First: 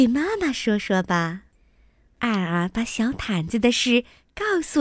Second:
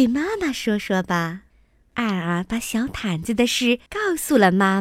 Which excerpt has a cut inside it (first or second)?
second